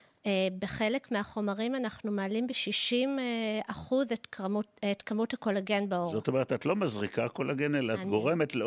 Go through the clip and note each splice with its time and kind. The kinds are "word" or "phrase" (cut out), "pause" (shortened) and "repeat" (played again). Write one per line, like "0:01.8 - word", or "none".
none